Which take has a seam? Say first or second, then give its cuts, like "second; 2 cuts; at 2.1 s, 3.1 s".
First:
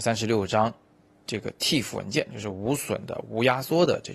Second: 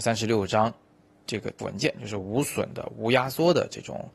second; 1 cut; at 1.6 s